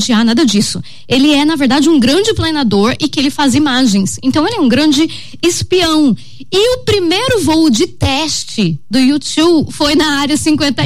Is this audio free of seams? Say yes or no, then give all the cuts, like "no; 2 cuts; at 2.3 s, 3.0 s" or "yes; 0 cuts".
yes; 0 cuts